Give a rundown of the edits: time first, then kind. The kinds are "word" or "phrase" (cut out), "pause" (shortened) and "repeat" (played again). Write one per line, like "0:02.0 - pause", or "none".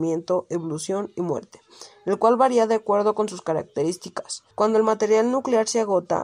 0:04.5 - pause

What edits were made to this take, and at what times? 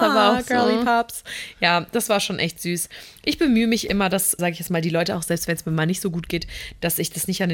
0:04.4 - word

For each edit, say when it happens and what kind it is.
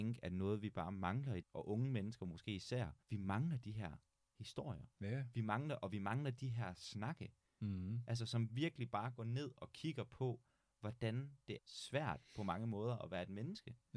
0:01.4 - word
0:03.0 - pause
0:11.6 - word

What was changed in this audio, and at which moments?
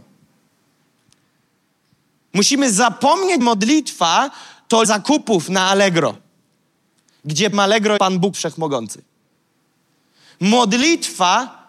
0:03.4 - word
0:04.8 - word
0:07.5 - word
0:08.0 - word
0:08.3 - word

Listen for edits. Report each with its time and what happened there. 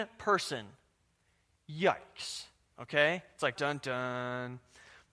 0:03.6 - word

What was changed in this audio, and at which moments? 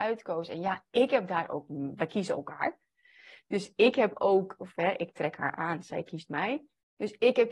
none

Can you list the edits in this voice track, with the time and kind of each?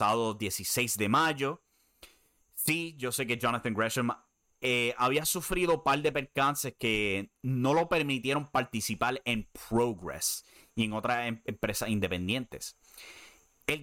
none

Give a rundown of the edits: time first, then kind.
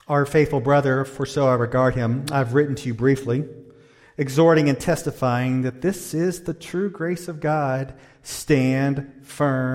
none

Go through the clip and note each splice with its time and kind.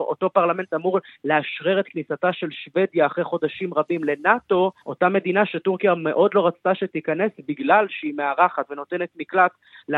0:04.8 - pause

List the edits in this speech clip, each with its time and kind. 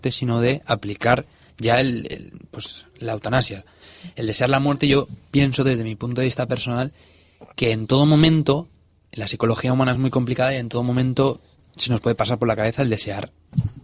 none

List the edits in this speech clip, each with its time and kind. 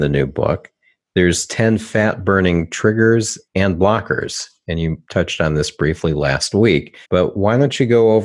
0:03.5 - pause
0:07.0 - pause

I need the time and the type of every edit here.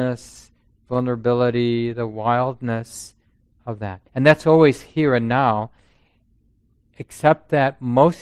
0:04.1 - pause

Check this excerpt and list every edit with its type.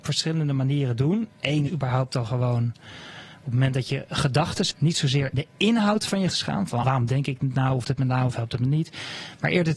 0:01.7 - word
0:04.7 - word
0:05.3 - word
0:06.3 - word
0:06.8 - word
0:07.8 - word

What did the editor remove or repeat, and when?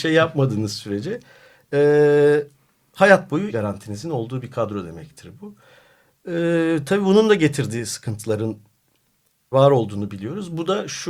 0:03.5 - word
0:09.5 - word

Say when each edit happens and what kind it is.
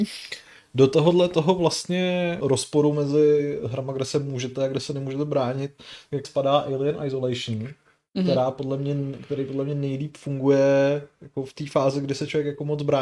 0:02.4 - word
0:06.2 - word

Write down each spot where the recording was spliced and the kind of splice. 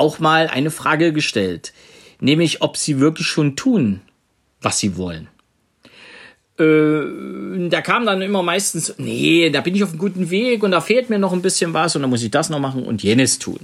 none

